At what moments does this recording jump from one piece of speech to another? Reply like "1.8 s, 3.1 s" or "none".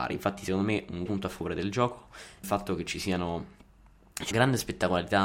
1.1 s, 2.4 s, 4.3 s